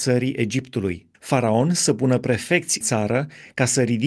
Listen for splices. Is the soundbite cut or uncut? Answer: cut